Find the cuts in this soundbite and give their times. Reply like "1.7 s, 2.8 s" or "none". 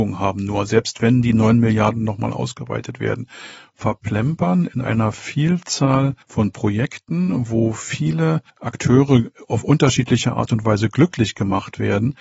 6.2 s, 8.5 s